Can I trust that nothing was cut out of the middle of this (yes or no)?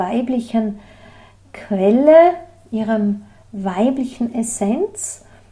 yes